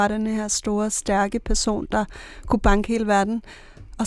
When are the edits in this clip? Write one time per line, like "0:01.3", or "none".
none